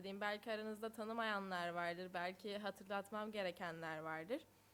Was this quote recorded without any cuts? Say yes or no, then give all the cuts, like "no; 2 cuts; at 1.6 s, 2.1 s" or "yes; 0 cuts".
yes; 0 cuts